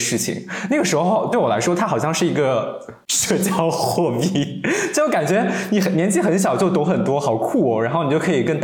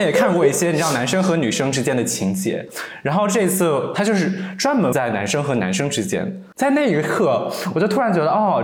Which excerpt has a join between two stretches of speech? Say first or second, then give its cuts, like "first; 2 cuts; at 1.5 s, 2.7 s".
second; 1 cut; at 4.9 s